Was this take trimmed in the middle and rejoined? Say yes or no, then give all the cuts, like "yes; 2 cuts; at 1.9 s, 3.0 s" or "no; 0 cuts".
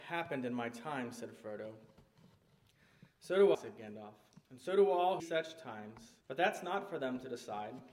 yes; 4 cuts; at 3.5 s, 4.4 s, 5.2 s, 6.2 s